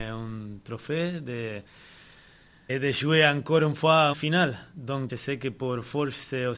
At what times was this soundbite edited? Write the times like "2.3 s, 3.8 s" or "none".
2.7 s, 4.1 s, 5.1 s